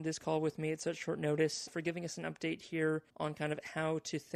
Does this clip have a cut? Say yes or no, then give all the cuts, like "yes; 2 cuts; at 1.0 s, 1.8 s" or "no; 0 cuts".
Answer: yes; 2 cuts; at 1.7 s, 3.1 s